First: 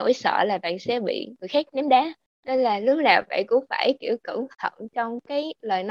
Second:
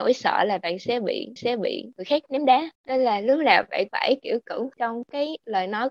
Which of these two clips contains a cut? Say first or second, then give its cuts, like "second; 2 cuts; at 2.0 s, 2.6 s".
second; 4 cuts; at 1.4 s, 2.7 s, 3.9 s, 4.7 s